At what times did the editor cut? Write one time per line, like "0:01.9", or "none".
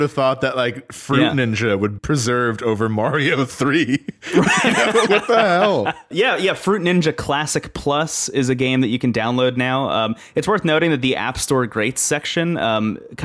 0:02.0
0:05.1
0:06.1